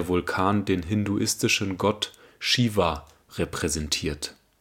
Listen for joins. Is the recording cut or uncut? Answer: uncut